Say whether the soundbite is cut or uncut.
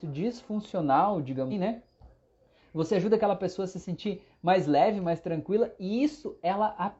cut